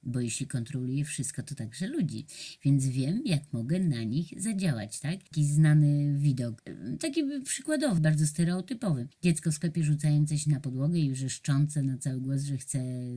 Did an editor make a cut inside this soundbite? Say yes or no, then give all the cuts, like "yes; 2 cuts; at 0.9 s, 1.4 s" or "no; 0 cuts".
yes; 1 cut; at 8.0 s